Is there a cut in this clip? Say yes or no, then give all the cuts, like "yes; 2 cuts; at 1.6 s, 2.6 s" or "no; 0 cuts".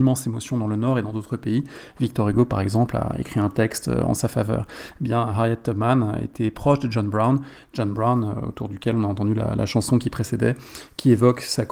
no; 0 cuts